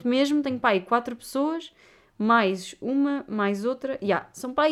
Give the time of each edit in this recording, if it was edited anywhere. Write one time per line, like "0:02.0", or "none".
none